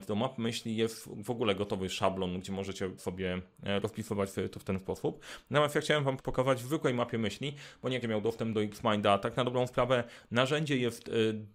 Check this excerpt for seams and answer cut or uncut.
cut